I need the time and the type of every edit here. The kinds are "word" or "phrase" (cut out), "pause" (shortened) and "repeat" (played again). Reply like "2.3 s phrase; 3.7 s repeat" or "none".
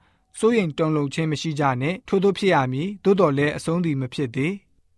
2.0 s pause